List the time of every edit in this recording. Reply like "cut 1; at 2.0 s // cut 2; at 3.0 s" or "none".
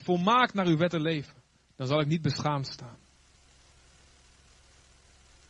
none